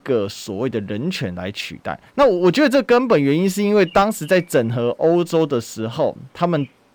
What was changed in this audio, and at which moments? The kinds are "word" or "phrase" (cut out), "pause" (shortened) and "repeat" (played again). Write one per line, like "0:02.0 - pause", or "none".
0:02.1 - pause